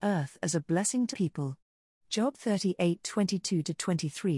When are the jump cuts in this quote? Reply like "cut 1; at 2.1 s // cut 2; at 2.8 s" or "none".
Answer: cut 1; at 1.1 s